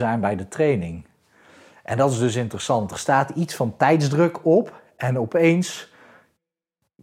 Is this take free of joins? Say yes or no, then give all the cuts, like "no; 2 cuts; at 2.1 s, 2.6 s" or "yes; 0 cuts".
yes; 0 cuts